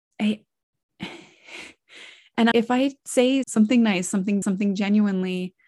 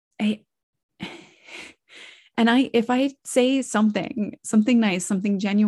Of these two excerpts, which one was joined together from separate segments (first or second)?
first